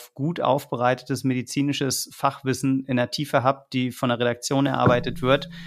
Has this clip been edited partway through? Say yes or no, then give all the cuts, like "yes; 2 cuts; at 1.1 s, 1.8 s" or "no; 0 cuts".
no; 0 cuts